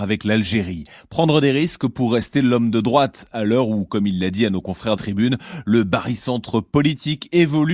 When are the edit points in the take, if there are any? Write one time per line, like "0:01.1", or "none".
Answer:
0:05.0